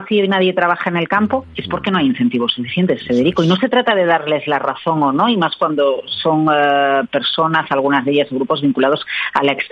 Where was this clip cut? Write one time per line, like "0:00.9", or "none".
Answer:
none

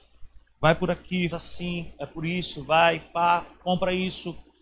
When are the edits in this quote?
0:01.3

